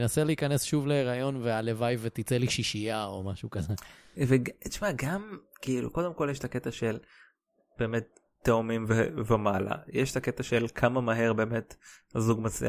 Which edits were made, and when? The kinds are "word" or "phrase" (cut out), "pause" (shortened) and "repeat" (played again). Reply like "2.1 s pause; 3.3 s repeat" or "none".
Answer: none